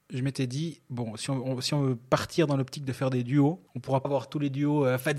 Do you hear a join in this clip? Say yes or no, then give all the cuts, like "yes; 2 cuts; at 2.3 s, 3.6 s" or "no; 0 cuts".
yes; 2 cuts; at 3.7 s, 4.0 s